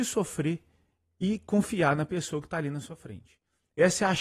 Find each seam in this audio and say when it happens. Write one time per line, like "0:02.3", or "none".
none